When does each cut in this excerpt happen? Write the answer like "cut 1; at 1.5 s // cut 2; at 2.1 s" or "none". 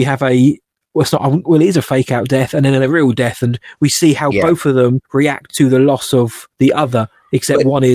cut 1; at 5.0 s // cut 2; at 6.5 s